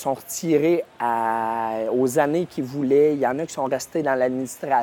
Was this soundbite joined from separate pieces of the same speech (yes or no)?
no